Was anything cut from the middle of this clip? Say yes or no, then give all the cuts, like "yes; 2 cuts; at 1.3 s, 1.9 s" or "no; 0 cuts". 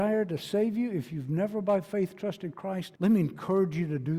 yes; 1 cut; at 3.0 s